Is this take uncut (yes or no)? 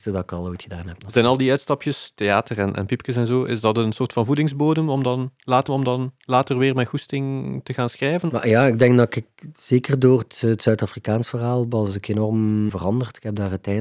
no